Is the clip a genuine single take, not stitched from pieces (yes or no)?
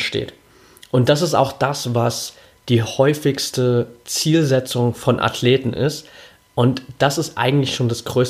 yes